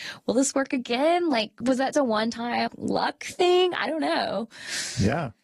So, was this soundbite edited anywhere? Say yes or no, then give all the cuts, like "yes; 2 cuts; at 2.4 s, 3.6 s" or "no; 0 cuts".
yes; 3 cuts; at 1.6 s, 1.9 s, 2.7 s